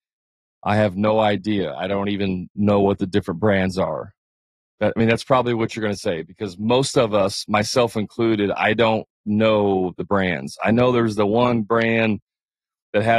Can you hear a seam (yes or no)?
no